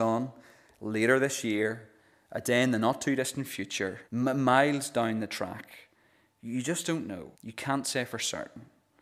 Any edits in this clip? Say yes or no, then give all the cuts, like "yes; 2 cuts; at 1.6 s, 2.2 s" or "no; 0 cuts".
yes; 2 cuts; at 4.0 s, 7.3 s